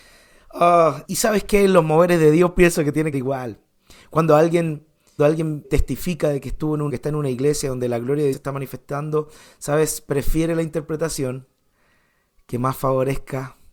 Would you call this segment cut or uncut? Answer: cut